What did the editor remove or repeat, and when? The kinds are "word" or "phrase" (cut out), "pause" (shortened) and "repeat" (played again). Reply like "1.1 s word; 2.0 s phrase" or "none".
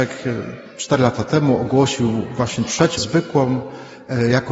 3.0 s word